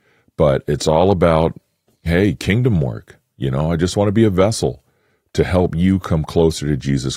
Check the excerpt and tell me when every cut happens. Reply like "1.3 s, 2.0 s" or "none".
none